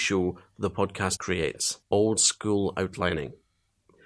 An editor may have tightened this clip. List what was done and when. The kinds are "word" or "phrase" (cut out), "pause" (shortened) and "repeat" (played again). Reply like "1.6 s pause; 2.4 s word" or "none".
1.2 s word; 1.8 s pause